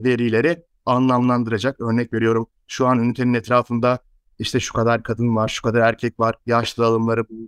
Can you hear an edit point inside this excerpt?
no; 0 cuts

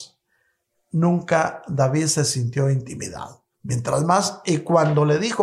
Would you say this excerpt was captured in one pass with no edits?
no; 1 cut; at 3.5 s

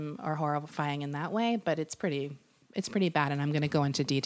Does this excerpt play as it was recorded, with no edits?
yes; 0 cuts

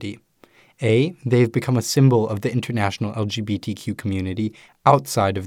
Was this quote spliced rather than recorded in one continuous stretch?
no; 0 cuts

